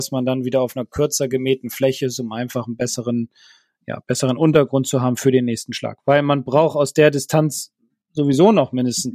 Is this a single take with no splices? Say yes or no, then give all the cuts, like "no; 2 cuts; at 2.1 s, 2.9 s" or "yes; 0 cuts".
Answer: yes; 0 cuts